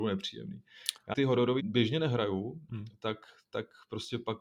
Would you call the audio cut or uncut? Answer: cut